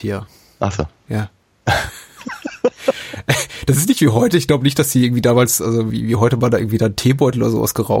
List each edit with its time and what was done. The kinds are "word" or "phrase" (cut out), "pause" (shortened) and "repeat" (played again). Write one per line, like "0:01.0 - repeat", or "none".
0:05.9 - word